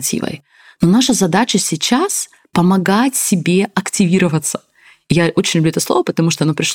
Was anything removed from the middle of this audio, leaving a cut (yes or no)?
no